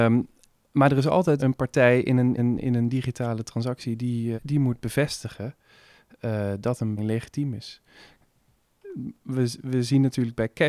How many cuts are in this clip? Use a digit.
4